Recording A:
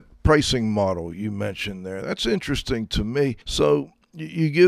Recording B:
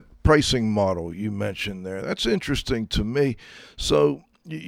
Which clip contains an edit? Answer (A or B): A